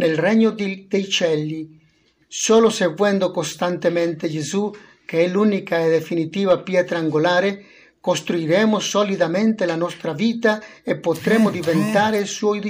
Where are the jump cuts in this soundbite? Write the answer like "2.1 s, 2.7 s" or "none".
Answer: none